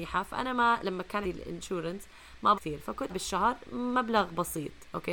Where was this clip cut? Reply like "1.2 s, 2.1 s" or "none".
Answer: 1.2 s, 2.5 s, 3.1 s